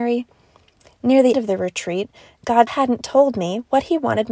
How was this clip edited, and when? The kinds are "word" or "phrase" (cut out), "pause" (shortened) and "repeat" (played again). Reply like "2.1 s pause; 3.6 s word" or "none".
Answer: 1.3 s word; 2.7 s word